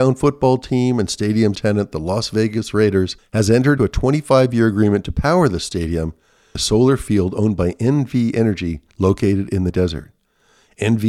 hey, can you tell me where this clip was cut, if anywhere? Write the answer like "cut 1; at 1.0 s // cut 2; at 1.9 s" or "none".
cut 1; at 1.5 s // cut 2; at 3.2 s // cut 3; at 3.8 s // cut 4; at 6.6 s // cut 5; at 8.9 s // cut 6; at 9.7 s